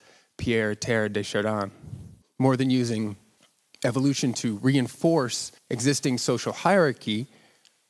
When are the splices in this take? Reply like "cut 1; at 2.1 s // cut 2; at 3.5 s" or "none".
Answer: cut 1; at 2.2 s // cut 2; at 3.4 s // cut 3; at 5.6 s